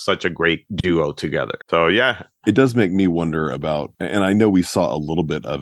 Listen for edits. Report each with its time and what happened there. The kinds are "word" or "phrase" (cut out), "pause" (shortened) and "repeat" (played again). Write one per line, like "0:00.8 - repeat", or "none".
0:01.6 - pause
0:03.9 - pause